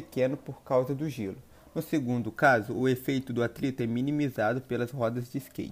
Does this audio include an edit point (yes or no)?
no